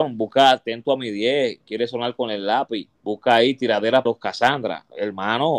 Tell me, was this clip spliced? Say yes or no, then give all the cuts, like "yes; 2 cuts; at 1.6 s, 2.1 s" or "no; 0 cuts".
yes; 3 cuts; at 1.6 s, 2.9 s, 4.1 s